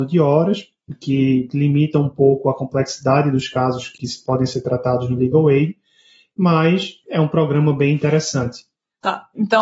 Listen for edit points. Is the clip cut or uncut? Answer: uncut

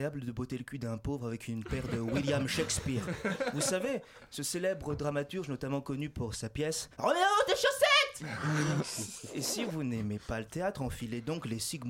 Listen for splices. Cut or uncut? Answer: cut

